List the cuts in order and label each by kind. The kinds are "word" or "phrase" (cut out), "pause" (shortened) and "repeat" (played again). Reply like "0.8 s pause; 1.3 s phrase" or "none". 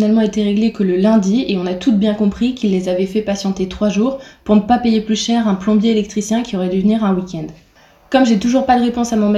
none